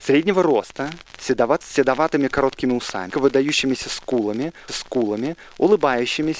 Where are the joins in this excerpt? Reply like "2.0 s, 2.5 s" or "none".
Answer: 1.6 s, 3.1 s, 4.7 s

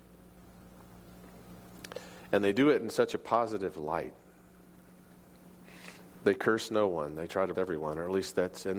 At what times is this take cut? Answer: 7.5 s

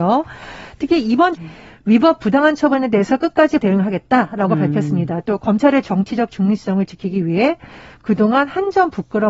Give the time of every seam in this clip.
1.3 s, 3.6 s

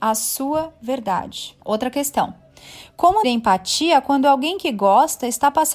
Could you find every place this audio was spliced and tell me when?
1.6 s, 3.2 s

